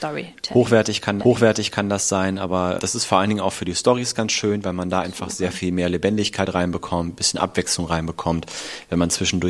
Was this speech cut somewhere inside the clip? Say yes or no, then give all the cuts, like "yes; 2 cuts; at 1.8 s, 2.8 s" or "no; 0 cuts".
yes; 2 cuts; at 1.2 s, 2.8 s